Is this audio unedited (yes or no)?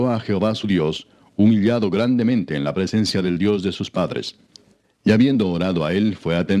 yes